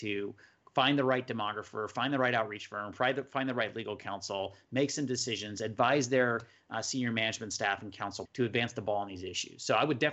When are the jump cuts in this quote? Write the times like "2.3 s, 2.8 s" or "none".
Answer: 8.3 s